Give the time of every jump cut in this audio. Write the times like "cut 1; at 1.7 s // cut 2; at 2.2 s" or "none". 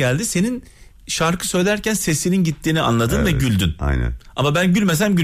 none